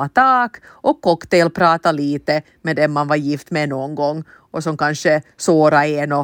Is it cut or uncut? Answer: uncut